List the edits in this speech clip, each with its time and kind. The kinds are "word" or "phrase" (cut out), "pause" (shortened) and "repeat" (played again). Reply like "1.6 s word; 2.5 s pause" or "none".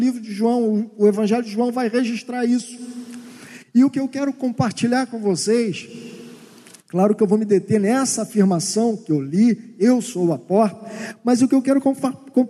none